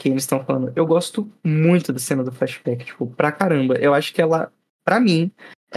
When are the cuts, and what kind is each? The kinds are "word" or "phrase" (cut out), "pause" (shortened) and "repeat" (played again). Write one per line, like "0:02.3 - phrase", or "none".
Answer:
none